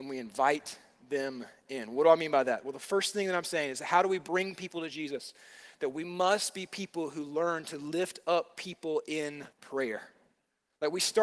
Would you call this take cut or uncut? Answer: cut